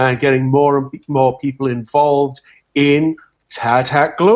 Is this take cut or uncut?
uncut